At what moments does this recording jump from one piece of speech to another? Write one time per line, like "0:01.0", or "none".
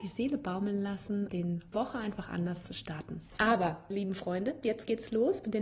0:01.3
0:01.7
0:03.9